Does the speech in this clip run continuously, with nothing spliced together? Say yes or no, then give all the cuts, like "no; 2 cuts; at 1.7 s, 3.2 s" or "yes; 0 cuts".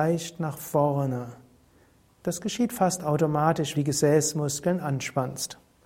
no; 2 cuts; at 2.0 s, 3.7 s